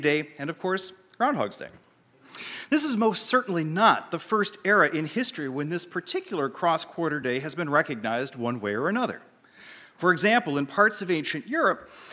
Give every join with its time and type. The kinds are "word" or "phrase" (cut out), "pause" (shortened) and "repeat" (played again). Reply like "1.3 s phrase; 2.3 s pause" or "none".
none